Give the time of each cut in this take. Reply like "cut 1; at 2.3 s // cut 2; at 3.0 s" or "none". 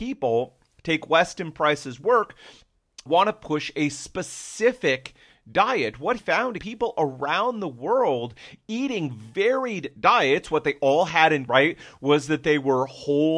cut 1; at 3.1 s // cut 2; at 6.2 s // cut 3; at 6.6 s // cut 4; at 11.5 s